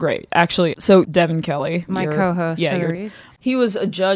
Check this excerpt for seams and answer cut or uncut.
cut